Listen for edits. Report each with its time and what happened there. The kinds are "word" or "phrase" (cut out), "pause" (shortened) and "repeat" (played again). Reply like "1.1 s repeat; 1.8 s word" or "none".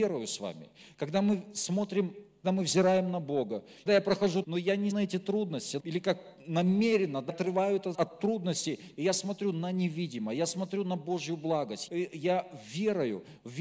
2.4 s word; 3.9 s word; 4.4 s word; 4.9 s word; 5.8 s word; 7.3 s word; 7.9 s word; 11.9 s word